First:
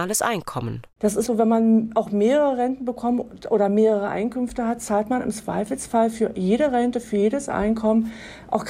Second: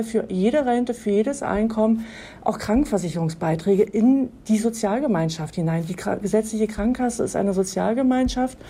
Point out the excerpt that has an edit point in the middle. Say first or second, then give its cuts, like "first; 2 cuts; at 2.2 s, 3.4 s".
first; 1 cut; at 1.3 s